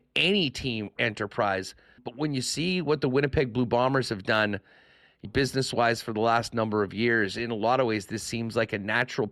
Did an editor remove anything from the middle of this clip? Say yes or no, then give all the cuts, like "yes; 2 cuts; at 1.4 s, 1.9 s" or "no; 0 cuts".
yes; 3 cuts; at 1.0 s, 2.0 s, 5.2 s